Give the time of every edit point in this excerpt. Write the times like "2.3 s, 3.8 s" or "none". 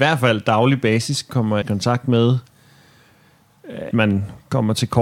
1.6 s, 3.9 s

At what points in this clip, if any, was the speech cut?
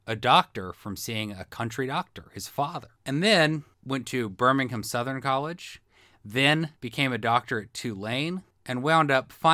none

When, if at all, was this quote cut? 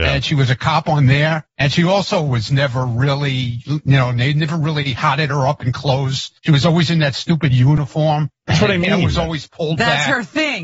1.5 s, 6.4 s, 8.4 s

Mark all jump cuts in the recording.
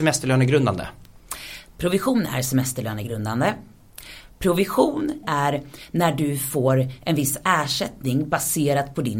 5.2 s

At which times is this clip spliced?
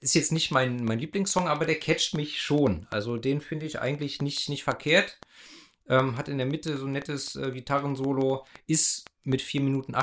none

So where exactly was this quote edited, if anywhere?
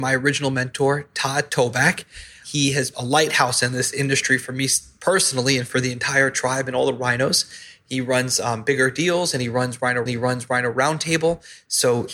2.9 s, 10.1 s

